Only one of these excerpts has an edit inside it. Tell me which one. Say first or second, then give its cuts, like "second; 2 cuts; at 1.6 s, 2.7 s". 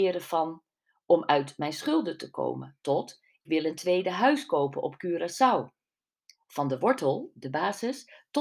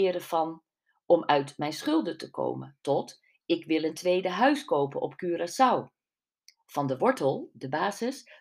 first; 1 cut; at 3.5 s